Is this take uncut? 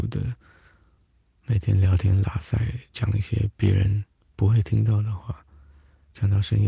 yes; 0 cuts

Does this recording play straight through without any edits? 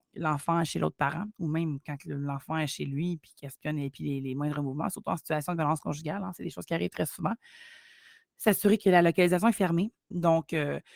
yes; 0 cuts

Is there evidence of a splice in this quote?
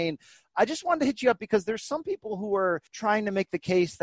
yes; 1 cut; at 2.9 s

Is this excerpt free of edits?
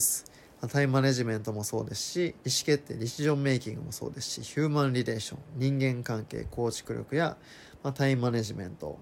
no; 1 cut; at 2.4 s

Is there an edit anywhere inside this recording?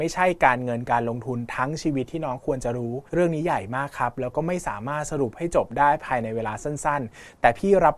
yes; 1 cut; at 3.1 s

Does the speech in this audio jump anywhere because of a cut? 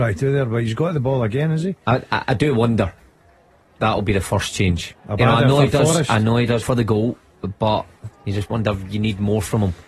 yes; 4 cuts; at 3.8 s, 5.0 s, 6.6 s, 8.1 s

